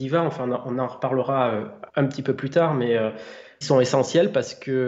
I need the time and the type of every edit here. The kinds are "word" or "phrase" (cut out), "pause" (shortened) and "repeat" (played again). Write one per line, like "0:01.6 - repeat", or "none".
0:01.9 - pause
0:03.6 - word